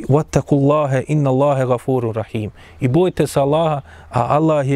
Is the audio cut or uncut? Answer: uncut